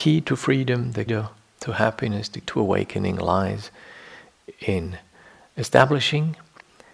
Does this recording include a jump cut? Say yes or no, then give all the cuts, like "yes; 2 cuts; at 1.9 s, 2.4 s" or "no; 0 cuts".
yes; 2 cuts; at 1.1 s, 2.4 s